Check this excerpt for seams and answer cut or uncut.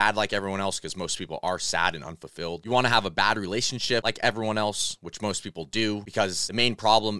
uncut